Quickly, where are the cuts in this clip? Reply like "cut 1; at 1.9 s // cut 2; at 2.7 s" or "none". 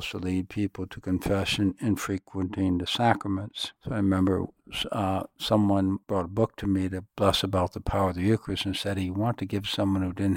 cut 1; at 3.8 s // cut 2; at 6.0 s // cut 3; at 7.1 s